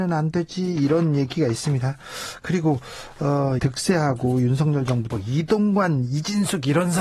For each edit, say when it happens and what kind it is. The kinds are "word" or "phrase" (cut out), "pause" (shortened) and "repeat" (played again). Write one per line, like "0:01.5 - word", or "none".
0:03.6 - word
0:05.1 - phrase